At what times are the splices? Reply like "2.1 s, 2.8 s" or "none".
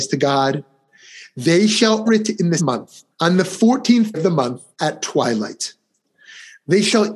2.1 s, 2.6 s, 3.1 s, 4.1 s, 4.7 s